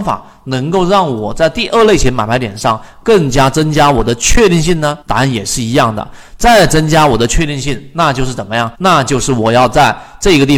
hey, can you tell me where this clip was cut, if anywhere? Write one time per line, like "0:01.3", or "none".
0:05.0
0:08.7